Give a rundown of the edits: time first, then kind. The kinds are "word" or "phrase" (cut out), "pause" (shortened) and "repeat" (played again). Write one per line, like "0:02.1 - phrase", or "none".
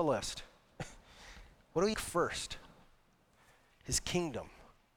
0:01.9 - word